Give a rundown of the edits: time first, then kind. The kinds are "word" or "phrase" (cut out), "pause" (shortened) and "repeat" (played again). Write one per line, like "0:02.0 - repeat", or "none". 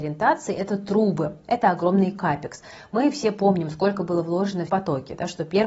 0:04.7 - word